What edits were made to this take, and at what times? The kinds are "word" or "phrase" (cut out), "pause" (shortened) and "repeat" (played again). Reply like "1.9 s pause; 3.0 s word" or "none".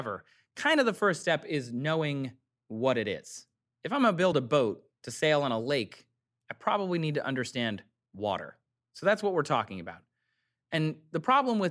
none

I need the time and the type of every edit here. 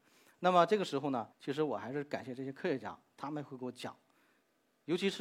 1.3 s pause

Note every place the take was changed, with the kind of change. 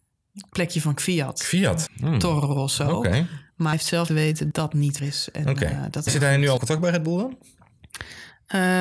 1.9 s word; 3.7 s word; 4.1 s word; 4.5 s word; 5.0 s word; 6.1 s word; 6.6 s word

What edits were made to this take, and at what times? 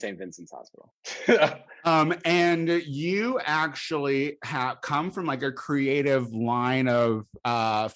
none

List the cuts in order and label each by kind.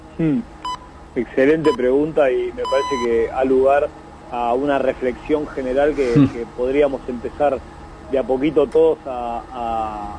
none

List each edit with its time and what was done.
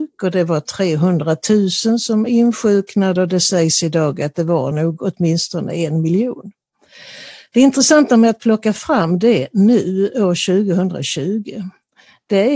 none

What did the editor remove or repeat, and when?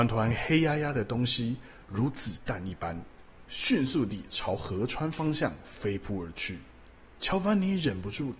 6.8 s pause

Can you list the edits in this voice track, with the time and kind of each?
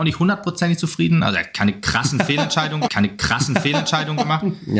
2.9 s repeat

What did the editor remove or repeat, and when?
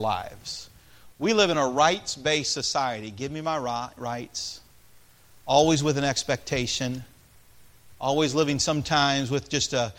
none

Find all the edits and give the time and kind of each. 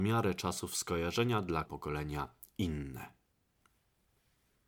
1.6 s word

